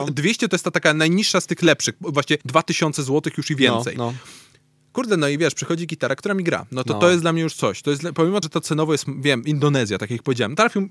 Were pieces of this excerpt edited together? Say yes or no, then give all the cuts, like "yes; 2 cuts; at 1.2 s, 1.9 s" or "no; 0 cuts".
yes; 2 cuts; at 2.4 s, 8.4 s